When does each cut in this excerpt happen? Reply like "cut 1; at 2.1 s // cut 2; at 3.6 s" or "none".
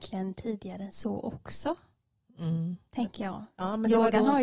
none